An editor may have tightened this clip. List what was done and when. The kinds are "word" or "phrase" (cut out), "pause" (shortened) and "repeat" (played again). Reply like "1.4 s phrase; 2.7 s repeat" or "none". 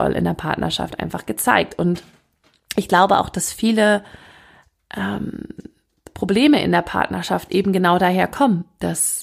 none